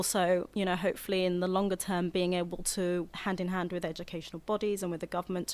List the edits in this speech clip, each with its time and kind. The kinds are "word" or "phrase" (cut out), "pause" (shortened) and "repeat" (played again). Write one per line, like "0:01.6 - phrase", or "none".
0:03.1 - phrase